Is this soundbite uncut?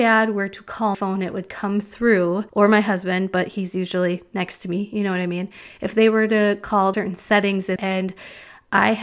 no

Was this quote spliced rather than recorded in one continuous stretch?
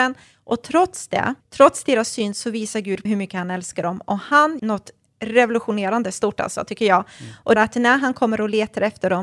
yes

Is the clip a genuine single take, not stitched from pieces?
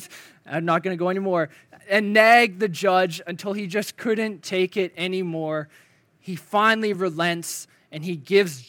yes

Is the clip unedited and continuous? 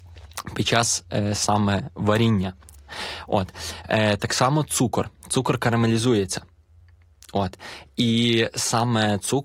yes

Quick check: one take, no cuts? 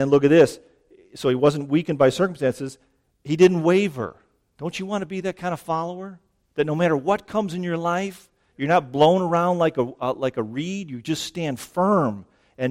yes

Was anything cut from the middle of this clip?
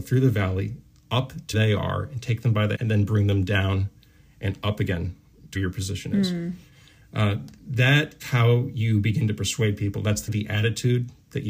yes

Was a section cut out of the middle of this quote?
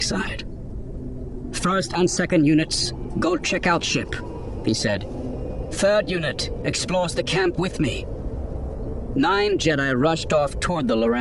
yes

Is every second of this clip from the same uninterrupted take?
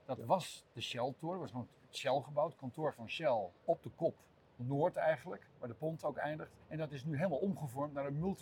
no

